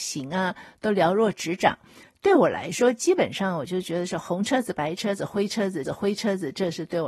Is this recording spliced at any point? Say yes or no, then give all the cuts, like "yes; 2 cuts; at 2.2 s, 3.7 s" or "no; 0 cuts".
yes; 1 cut; at 5.8 s